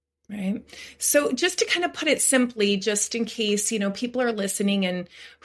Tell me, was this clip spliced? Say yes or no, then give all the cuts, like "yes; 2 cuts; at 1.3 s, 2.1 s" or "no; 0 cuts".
no; 0 cuts